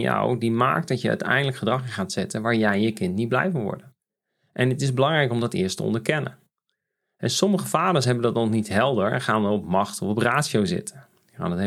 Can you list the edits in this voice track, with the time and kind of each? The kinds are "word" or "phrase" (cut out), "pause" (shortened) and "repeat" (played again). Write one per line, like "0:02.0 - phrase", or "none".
none